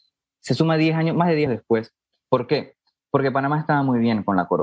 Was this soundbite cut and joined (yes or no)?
yes